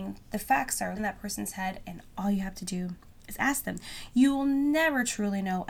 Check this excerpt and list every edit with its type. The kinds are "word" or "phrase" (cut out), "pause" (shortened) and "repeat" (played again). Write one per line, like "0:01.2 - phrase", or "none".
0:01.0 - word